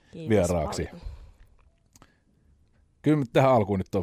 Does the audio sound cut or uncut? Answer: uncut